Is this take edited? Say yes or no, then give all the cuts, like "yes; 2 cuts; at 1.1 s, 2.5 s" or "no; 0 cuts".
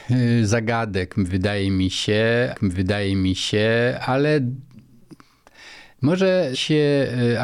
yes; 2 cuts; at 2.5 s, 6.5 s